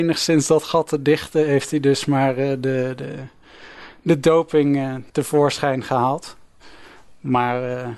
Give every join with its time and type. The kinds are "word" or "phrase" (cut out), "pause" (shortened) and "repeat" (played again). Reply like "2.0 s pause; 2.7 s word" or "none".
5.1 s pause